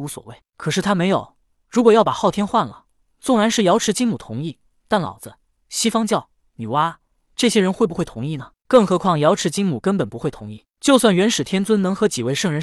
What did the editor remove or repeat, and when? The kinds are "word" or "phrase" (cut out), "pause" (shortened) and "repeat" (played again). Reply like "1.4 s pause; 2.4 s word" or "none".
none